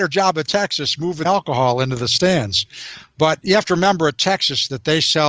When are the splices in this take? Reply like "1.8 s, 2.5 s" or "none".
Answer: 1.2 s